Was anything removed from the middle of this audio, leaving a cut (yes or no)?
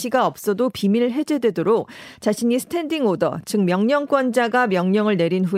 no